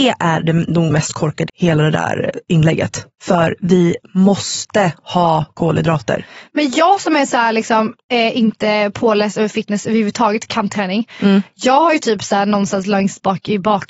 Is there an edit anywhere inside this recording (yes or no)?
yes